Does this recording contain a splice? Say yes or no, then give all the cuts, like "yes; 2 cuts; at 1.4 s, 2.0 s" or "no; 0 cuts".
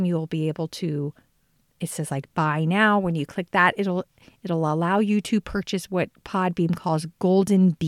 no; 0 cuts